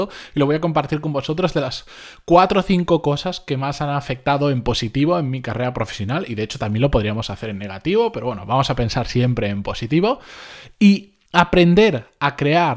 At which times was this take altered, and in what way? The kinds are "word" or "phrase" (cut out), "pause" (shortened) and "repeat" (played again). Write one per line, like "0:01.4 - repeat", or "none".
0:11.3 - pause